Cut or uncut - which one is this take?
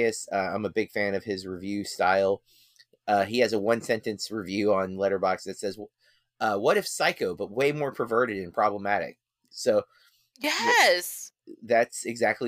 uncut